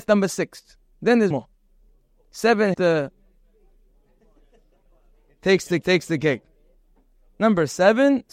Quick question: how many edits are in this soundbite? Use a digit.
3